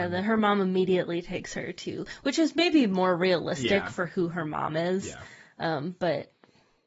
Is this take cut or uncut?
uncut